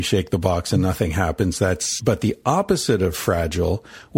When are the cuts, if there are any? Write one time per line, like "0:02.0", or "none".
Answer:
0:02.0